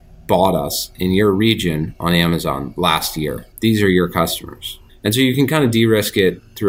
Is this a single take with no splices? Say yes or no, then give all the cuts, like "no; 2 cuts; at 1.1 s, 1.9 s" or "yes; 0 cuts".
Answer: no; 2 cuts; at 3.5 s, 4.9 s